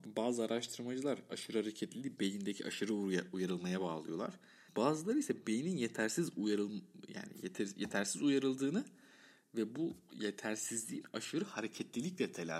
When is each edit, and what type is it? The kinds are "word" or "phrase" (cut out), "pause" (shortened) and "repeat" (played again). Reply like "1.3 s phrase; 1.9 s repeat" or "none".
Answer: 4.7 s pause